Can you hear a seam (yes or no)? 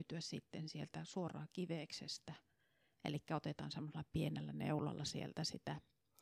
no